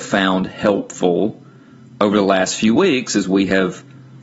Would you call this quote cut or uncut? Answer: uncut